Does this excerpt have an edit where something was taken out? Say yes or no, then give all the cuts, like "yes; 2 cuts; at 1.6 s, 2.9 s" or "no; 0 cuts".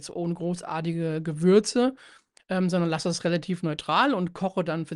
no; 0 cuts